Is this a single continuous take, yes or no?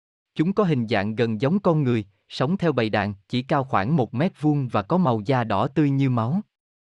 no